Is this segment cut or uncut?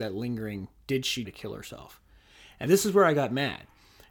cut